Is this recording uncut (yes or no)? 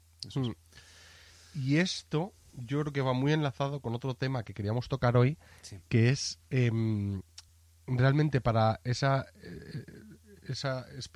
yes